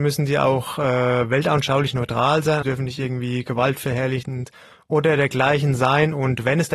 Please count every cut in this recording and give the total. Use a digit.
1